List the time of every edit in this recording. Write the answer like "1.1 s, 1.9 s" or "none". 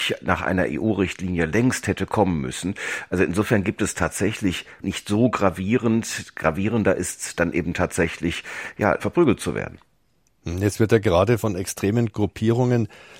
4.8 s, 9.0 s